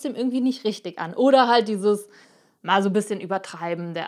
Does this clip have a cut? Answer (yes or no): no